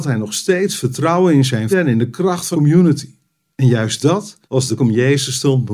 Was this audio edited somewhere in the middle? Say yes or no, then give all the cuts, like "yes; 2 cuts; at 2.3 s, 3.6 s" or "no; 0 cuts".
yes; 4 cuts; at 1.7 s, 2.5 s, 4.4 s, 4.8 s